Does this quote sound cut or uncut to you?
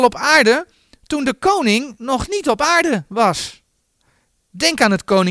uncut